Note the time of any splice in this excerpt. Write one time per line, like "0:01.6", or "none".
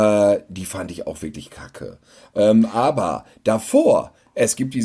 none